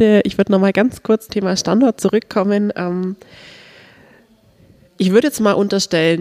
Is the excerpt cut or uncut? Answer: cut